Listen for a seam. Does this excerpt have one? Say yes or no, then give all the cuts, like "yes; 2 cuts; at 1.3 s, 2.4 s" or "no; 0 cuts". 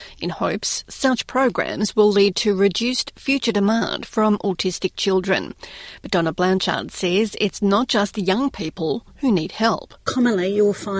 no; 0 cuts